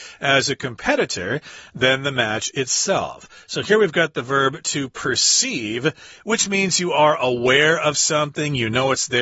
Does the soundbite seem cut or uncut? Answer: uncut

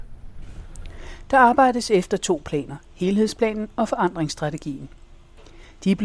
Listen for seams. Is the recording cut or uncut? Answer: uncut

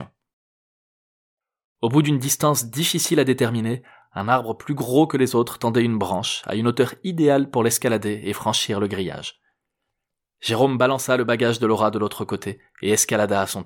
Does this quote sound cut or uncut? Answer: uncut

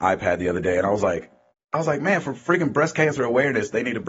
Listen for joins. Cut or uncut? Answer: cut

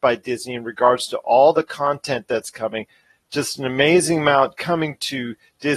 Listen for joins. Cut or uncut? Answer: uncut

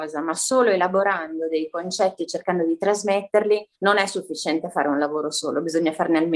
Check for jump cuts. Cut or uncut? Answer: cut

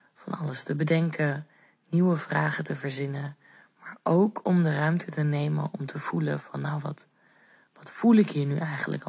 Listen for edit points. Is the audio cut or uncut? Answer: uncut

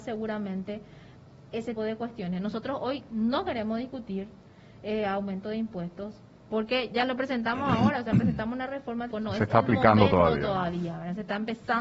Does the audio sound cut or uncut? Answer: cut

